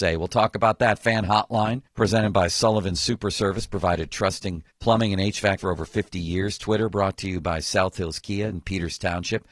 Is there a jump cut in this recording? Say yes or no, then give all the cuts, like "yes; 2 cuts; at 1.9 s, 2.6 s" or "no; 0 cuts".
yes; 3 cuts; at 1.9 s, 4.7 s, 5.6 s